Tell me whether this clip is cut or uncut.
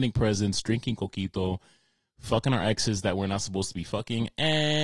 uncut